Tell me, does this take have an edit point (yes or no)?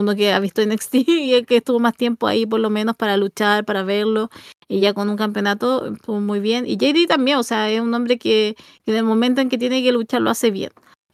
no